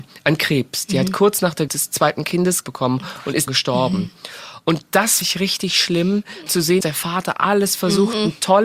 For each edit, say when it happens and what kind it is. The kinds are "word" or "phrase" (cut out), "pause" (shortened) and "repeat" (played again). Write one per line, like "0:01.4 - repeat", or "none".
0:01.7 - word
0:02.6 - word
0:03.5 - word
0:05.2 - word
0:06.5 - word
0:06.8 - word